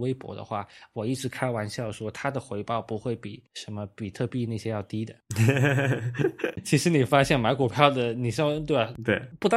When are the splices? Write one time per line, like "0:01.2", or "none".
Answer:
0:03.5